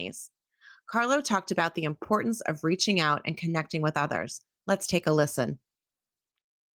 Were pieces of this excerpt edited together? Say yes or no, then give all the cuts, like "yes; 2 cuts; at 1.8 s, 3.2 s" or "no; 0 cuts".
no; 0 cuts